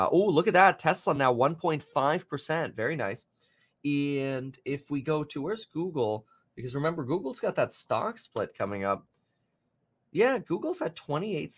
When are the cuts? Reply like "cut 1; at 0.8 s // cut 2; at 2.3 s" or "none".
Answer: none